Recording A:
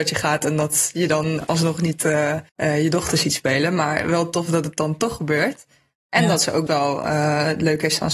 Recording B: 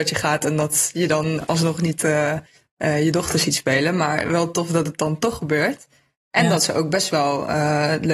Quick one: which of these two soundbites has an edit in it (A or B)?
A